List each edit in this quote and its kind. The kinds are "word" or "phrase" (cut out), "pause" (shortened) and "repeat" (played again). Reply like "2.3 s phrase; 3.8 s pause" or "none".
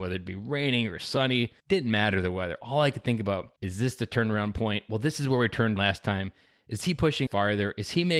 1.6 s pause; 3.6 s pause; 5.8 s word; 7.3 s word